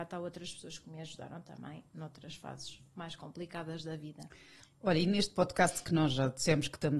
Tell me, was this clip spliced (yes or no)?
no